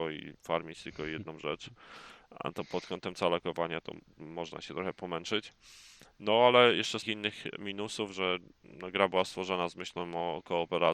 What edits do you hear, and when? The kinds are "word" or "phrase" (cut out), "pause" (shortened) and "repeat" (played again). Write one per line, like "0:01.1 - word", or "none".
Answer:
0:07.0 - word